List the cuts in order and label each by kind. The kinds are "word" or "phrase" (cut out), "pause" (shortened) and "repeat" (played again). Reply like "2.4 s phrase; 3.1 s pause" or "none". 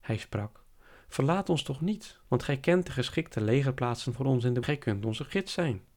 2.2 s pause; 4.6 s phrase

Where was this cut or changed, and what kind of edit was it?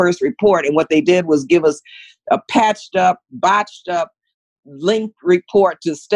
none

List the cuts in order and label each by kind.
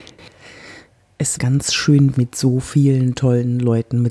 1.4 s phrase; 2.1 s word

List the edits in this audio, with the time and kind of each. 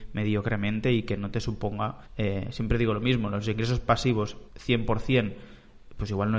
2.0 s pause; 4.5 s pause

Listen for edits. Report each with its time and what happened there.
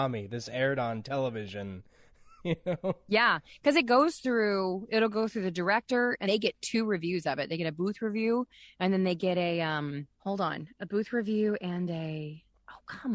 6.2 s word

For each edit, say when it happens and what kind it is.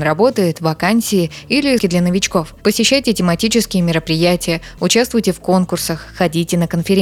1.8 s word

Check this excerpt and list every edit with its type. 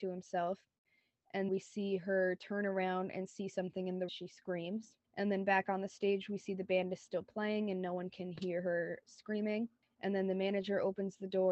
1.5 s word; 4.1 s phrase; 5.0 s pause; 9.0 s word

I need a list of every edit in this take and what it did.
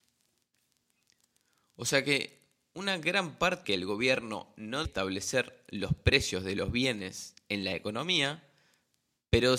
3.6 s phrase; 4.8 s word

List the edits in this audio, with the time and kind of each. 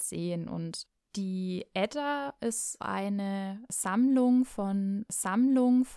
2.8 s word; 5.1 s repeat

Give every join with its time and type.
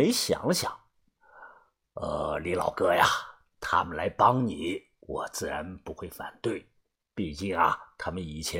none

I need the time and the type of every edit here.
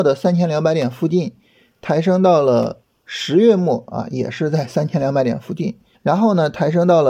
5.9 s pause

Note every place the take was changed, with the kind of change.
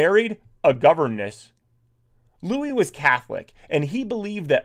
none

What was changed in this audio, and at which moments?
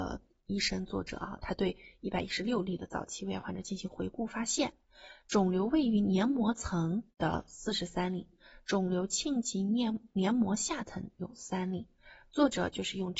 7.1 s pause

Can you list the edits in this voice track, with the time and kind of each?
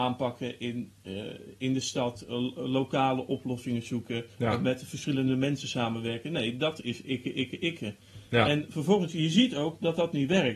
4.3 s pause; 7.0 s word

